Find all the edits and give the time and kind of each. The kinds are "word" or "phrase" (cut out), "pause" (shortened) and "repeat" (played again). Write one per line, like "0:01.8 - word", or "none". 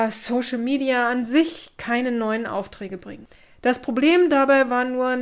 0:03.3 - pause